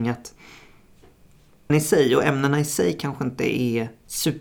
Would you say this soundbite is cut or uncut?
cut